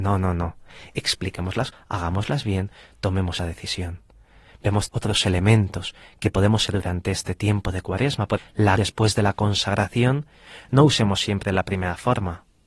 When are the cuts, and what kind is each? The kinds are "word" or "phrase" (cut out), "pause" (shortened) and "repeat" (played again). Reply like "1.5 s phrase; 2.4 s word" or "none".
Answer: 1.7 s word; 3.4 s word; 4.9 s word; 6.7 s word; 8.4 s word; 8.8 s word